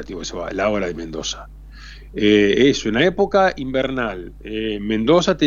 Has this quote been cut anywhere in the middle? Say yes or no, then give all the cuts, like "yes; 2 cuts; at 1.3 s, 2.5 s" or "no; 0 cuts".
no; 0 cuts